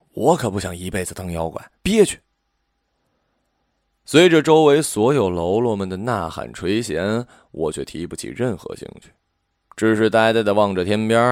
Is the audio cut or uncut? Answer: cut